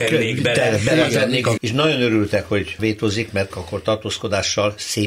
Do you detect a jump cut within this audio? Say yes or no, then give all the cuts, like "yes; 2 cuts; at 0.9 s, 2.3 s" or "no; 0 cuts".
yes; 3 cuts; at 1.6 s, 2.8 s, 3.5 s